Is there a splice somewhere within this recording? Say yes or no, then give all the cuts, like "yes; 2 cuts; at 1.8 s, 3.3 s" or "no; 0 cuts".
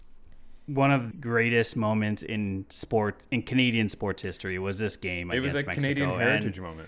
yes; 1 cut; at 1.1 s